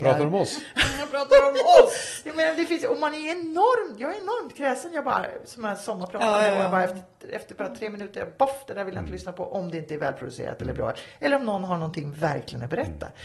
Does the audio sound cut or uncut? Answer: uncut